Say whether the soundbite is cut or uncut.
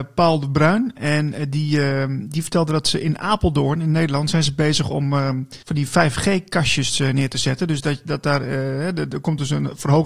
cut